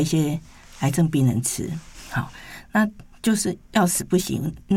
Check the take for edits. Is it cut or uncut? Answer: uncut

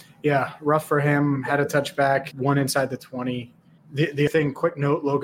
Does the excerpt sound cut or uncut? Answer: cut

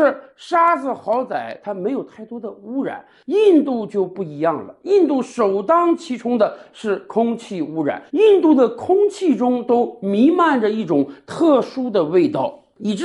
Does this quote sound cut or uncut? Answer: cut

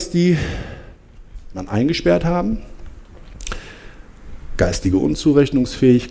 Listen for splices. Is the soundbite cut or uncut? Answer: cut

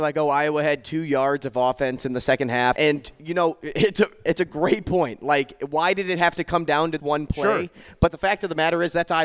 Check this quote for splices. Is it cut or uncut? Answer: cut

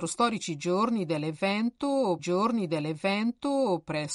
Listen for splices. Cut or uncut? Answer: cut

